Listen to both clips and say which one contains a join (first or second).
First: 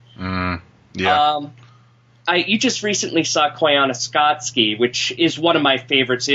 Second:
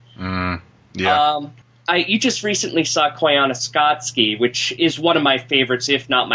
second